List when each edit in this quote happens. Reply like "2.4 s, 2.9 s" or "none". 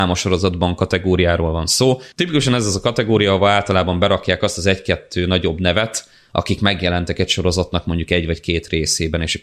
2.1 s